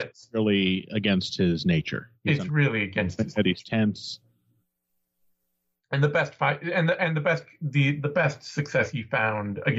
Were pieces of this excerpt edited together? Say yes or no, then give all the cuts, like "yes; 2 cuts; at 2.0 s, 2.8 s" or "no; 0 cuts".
no; 0 cuts